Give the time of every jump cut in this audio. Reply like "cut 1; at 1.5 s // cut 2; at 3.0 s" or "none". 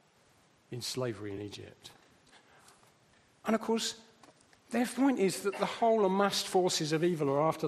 none